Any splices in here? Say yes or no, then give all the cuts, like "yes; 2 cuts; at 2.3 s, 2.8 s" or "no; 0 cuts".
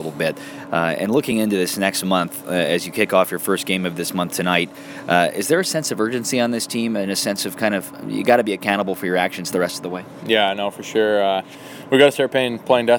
no; 0 cuts